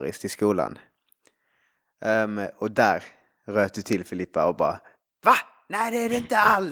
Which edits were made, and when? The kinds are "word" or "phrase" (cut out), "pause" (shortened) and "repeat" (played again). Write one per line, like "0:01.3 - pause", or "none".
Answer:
none